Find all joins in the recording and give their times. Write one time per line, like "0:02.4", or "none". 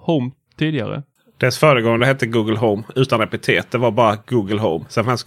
none